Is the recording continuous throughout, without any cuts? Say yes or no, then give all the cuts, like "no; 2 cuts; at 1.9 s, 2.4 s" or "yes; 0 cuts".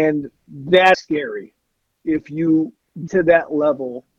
no; 3 cuts; at 0.9 s, 2.0 s, 3.1 s